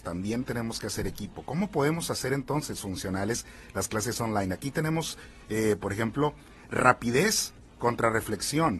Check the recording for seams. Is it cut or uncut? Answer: uncut